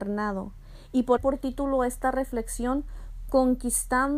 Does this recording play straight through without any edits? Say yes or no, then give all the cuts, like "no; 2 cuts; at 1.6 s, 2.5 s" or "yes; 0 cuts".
no; 1 cut; at 1.2 s